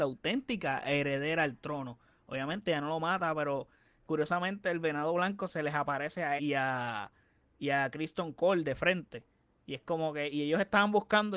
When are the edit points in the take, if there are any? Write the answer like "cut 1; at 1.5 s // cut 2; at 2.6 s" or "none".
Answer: cut 1; at 6.4 s